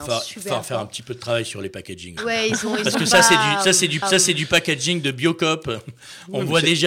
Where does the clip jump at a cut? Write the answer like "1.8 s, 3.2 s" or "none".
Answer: 2.2 s, 4.0 s